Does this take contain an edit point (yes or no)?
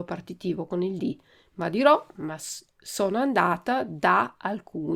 no